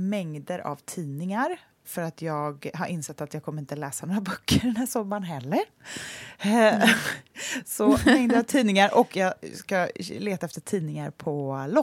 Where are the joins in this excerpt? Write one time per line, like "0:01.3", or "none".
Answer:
0:01.8